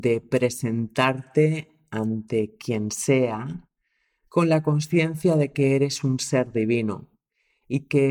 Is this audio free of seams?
yes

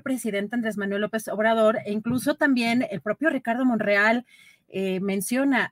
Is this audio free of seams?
yes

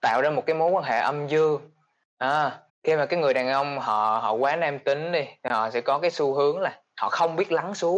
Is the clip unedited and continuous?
no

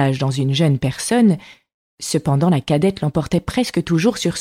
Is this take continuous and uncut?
yes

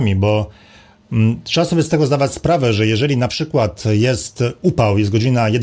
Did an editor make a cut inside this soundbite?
no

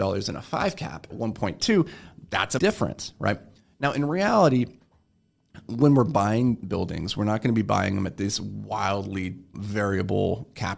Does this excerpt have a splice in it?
yes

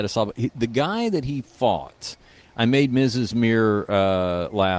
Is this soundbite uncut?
yes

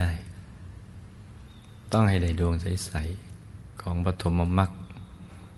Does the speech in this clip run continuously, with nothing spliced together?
no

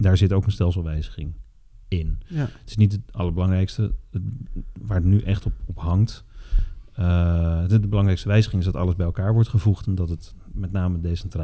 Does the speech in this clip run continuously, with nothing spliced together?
yes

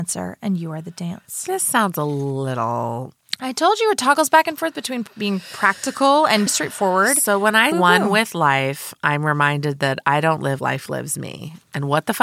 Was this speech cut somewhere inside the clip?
yes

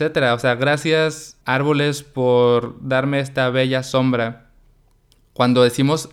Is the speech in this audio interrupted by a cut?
yes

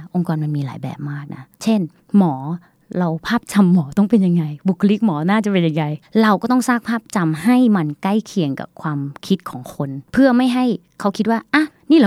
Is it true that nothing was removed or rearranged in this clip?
no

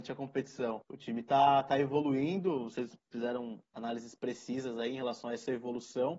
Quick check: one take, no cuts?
yes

